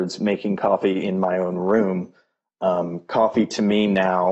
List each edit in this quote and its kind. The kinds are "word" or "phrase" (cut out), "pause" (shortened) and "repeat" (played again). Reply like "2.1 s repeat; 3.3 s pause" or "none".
none